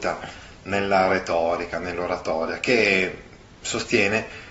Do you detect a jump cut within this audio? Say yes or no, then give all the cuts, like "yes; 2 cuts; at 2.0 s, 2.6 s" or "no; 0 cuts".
no; 0 cuts